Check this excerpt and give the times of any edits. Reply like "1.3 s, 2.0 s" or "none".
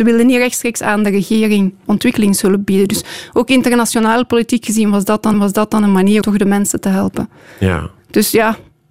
1.8 s, 5.3 s, 6.2 s